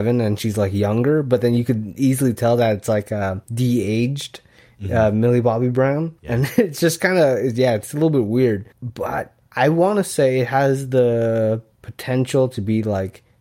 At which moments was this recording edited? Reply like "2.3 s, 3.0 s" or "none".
3.4 s, 6.2 s, 8.7 s, 11.7 s